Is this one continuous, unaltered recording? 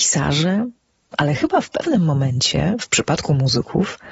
yes; 0 cuts

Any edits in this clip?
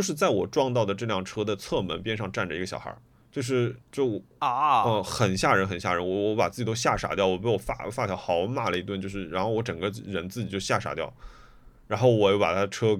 yes; 2 cuts; at 3.1 s, 3.8 s

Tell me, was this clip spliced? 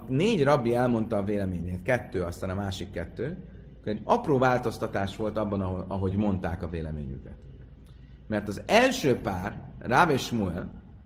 no; 0 cuts

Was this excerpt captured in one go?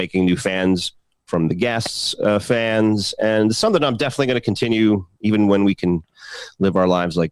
yes; 0 cuts

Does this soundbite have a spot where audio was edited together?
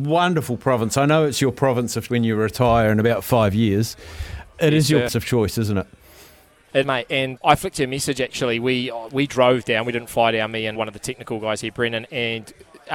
yes; 5 cuts; at 2.1 s, 5.1 s, 6.8 s, 7.4 s, 10.8 s

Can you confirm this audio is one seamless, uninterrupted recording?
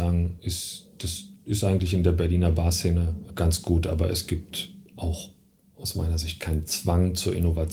yes; 0 cuts

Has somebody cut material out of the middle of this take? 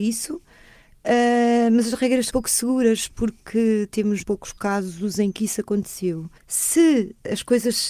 yes; 3 cuts; at 2.3 s, 4.2 s, 6.4 s

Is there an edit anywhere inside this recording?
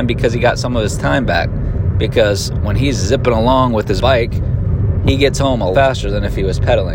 yes; 2 cuts; at 4.0 s, 5.7 s

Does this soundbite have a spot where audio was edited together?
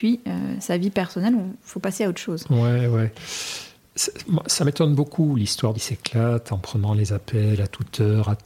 yes; 1 cut; at 5.7 s

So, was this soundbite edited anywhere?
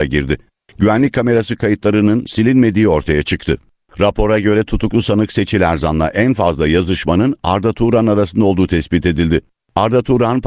no; 0 cuts

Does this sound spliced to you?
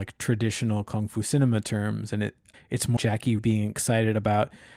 yes; 3 cuts; at 2.5 s, 3.0 s, 3.4 s

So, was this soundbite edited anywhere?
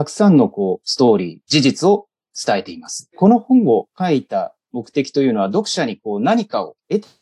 no; 0 cuts

